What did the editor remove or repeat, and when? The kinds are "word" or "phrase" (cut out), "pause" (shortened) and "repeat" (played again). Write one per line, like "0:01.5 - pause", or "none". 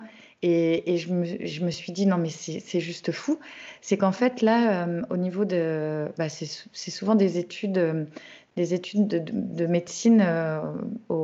none